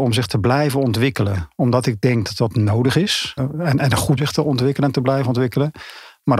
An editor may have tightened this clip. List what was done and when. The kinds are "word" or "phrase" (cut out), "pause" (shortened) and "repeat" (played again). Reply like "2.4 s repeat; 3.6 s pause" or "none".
3.4 s phrase; 4.2 s phrase